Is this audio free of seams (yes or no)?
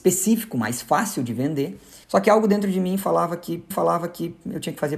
no